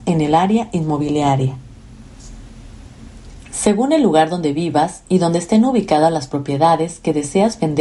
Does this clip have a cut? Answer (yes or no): no